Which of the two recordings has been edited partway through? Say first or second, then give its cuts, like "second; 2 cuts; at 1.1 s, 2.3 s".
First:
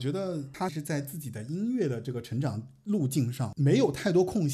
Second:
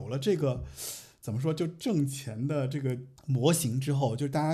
second; 1 cut; at 3.2 s